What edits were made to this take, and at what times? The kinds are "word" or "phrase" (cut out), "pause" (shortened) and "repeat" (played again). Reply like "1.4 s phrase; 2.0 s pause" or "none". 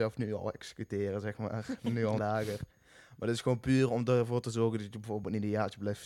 2.2 s word